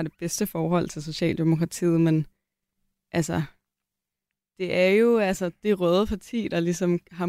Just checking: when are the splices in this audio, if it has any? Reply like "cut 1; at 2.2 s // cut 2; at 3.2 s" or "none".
none